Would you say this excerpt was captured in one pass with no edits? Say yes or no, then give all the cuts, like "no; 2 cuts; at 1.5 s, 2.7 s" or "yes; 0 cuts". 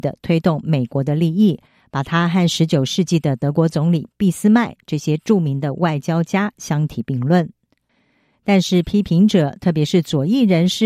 yes; 0 cuts